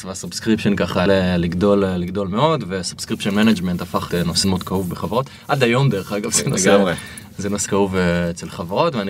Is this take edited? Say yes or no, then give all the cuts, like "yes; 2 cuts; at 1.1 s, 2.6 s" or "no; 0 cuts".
yes; 4 cuts; at 1.1 s, 4.1 s, 4.4 s, 7.7 s